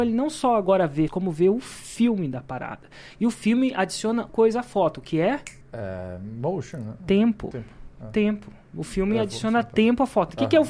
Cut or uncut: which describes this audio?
cut